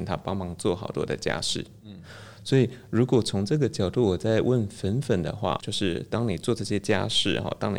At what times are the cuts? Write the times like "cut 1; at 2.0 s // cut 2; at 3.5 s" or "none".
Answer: cut 1; at 5.6 s